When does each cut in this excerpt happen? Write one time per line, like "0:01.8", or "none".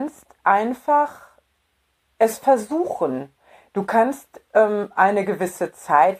none